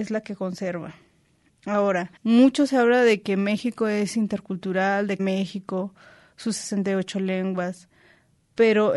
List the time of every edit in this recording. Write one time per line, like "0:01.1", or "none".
0:02.2
0:05.2